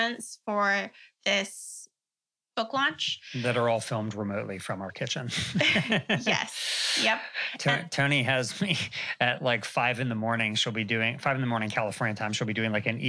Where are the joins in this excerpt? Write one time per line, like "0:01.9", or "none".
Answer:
none